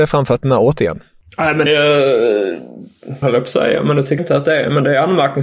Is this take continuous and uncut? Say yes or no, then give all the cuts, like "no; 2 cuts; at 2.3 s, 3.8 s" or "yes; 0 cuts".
no; 3 cuts; at 1.7 s, 3.2 s, 4.2 s